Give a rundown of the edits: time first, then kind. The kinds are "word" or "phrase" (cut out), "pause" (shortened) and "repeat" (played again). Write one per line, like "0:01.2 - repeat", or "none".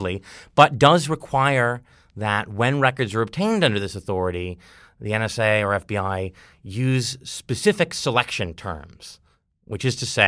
none